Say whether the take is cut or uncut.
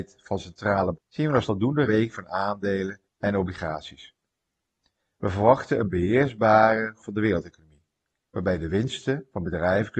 cut